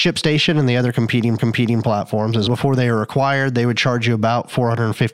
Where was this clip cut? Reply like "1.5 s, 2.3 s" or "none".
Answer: 1.4 s, 2.5 s